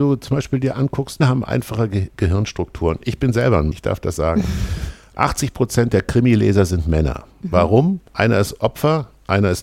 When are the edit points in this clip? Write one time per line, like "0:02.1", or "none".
0:01.2
0:03.7
0:08.1